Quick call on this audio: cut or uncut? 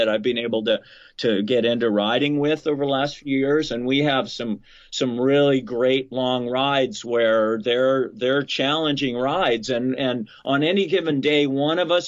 uncut